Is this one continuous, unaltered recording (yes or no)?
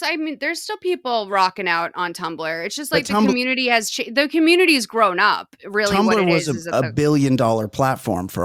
yes